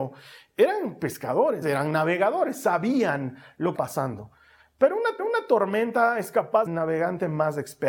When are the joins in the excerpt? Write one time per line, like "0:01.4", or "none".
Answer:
0:01.6
0:03.8
0:05.2
0:06.7